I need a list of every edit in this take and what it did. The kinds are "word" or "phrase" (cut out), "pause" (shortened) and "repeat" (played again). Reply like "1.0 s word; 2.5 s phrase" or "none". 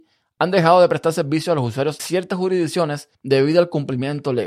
2.0 s word; 3.1 s pause